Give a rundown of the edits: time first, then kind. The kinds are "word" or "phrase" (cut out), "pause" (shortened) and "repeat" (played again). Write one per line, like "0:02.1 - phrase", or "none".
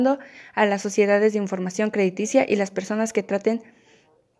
none

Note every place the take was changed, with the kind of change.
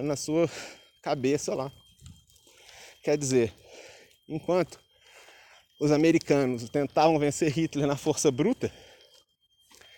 none

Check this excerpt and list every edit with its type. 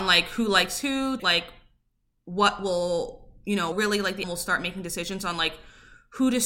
0:01.2 - phrase
0:03.7 - phrase
0:04.2 - word

